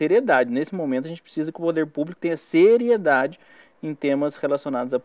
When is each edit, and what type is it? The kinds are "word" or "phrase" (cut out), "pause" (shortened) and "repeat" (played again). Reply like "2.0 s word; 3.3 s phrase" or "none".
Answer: none